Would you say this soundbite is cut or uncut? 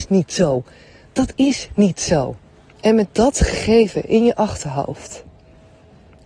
cut